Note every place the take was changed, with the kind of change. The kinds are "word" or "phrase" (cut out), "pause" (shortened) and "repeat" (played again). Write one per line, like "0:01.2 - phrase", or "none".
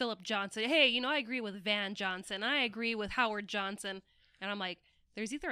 none